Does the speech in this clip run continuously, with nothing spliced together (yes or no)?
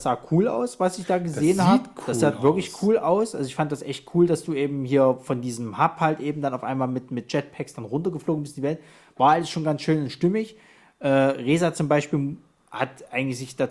yes